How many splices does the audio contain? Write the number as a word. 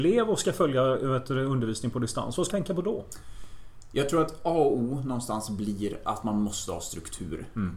one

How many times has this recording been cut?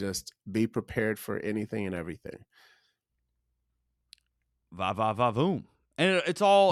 zero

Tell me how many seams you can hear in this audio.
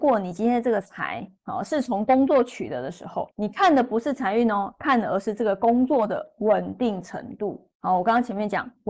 three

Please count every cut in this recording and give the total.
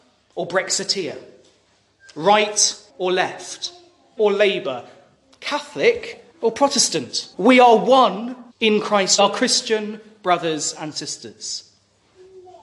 six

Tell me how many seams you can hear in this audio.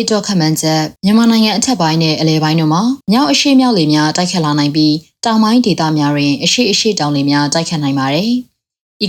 two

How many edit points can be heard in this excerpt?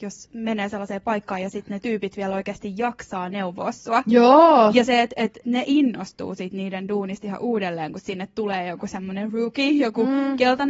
zero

